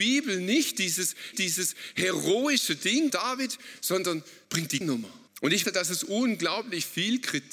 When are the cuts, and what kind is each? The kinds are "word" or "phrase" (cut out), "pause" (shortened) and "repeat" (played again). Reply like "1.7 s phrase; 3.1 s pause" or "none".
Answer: 1.3 s repeat; 3.1 s word; 4.4 s pause; 4.8 s word; 5.3 s pause; 5.6 s word

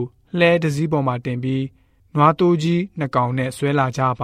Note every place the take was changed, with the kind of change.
none

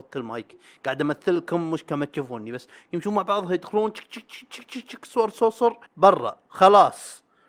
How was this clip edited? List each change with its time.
5.9 s pause

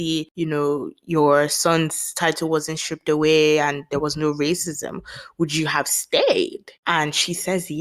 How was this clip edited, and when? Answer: none

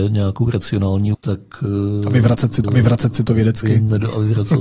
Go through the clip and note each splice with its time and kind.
1.1 s word; 2.6 s repeat

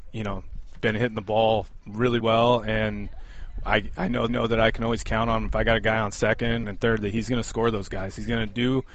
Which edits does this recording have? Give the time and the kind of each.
2.2 s word; 4.3 s repeat; 6.6 s phrase

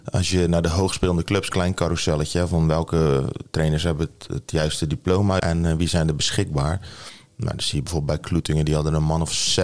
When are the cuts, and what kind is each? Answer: 1.5 s phrase; 5.4 s word

